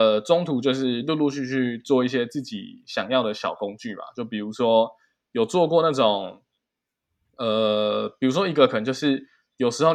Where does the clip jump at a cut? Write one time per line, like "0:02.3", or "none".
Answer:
none

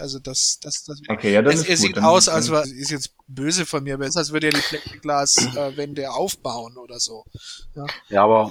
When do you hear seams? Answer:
0:02.6
0:04.1

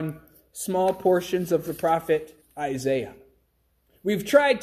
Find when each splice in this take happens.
0:02.4

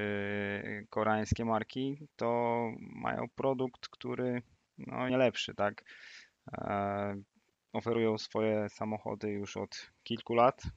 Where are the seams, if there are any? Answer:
0:05.1

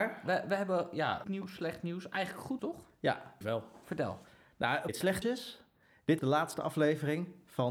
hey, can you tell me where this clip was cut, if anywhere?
0:01.2
0:02.6
0:03.4
0:04.9
0:05.2
0:06.2

